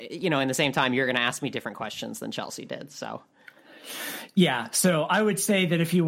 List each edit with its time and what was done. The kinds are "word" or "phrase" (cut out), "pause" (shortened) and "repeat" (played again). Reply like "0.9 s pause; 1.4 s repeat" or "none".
none

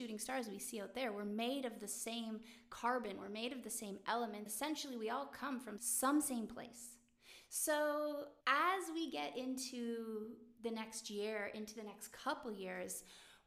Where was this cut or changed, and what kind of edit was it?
4.5 s word; 5.8 s word; 8.4 s pause

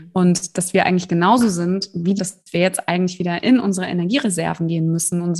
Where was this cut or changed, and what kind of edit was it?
2.2 s phrase

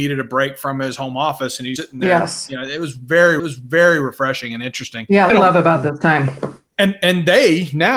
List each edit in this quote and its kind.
1.8 s word; 3.4 s repeat; 5.3 s phrase

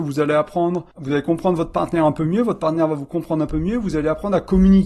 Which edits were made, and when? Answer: 0.9 s pause

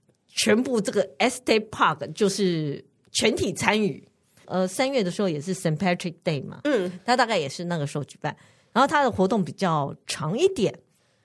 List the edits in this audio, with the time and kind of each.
none

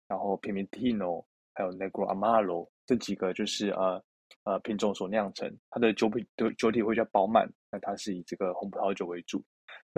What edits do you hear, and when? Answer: none

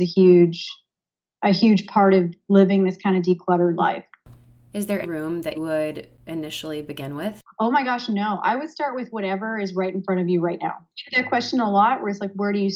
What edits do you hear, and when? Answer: 5.0 s word; 5.5 s word

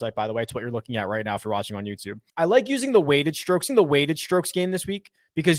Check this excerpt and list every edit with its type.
2.3 s pause; 3.7 s repeat

